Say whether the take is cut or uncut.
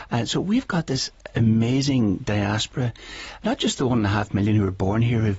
cut